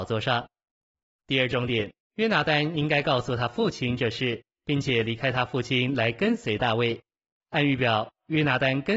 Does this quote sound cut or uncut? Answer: cut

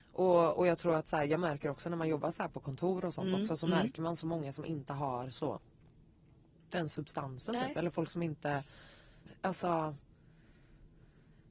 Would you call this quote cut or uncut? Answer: cut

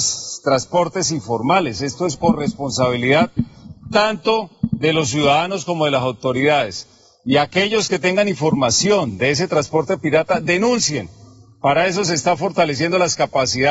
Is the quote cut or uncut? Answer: cut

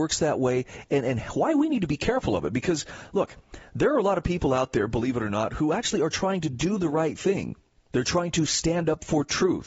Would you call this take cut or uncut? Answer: cut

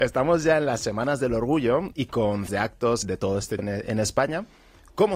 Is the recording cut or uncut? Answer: cut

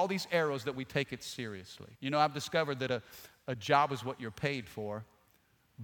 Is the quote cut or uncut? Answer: cut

